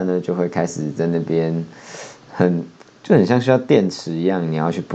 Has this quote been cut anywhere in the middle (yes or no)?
no